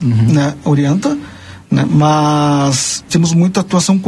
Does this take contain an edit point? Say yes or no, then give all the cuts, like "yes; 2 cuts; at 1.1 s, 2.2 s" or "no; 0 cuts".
yes; 1 cut; at 3.1 s